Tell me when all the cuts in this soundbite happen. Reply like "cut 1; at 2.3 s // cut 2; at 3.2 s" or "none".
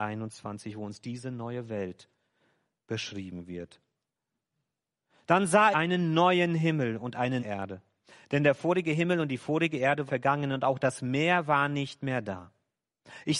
cut 1; at 5.7 s // cut 2; at 7.4 s // cut 3; at 10.1 s